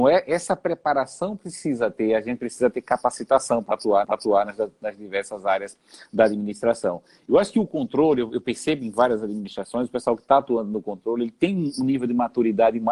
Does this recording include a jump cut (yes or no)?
yes